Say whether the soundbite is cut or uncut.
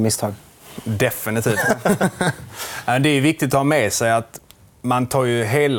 uncut